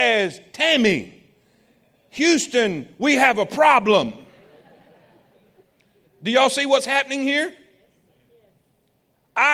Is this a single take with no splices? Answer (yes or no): yes